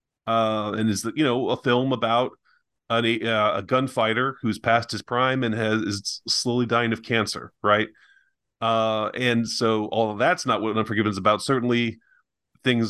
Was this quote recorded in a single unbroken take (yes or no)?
yes